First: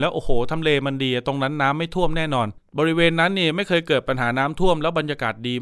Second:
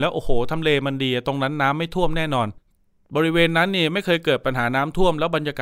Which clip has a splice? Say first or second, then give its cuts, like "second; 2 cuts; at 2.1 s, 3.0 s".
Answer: first; 1 cut; at 2.6 s